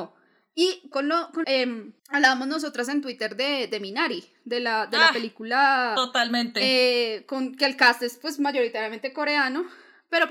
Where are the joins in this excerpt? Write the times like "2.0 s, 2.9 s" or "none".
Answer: 0.9 s, 1.4 s, 2.0 s